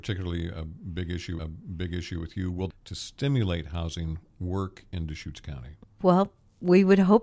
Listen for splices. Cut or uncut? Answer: cut